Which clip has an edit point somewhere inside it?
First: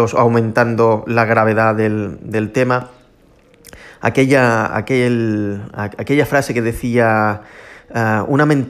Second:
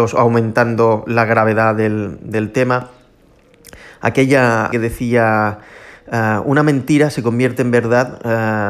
second; 1 cut; at 4.7 s

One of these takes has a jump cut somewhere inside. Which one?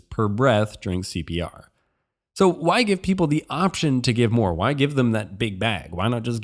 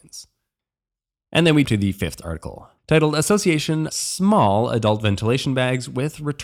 second; 3 cuts; at 1.6 s, 2.8 s, 3.9 s

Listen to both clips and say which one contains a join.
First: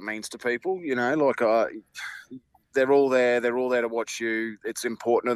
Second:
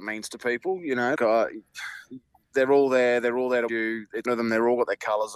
second; 3 cuts; at 1.2 s, 3.7 s, 4.3 s

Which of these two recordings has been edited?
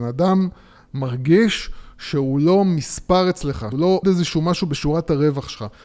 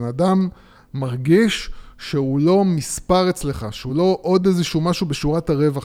first; 2 cuts; at 3.7 s, 4.0 s

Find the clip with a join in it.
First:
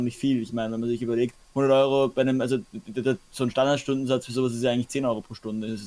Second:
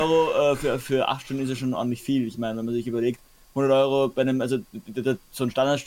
first; 1 cut; at 1.4 s

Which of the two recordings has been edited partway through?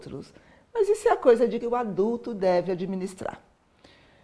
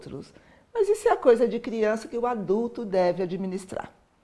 first; 1 cut; at 1.6 s

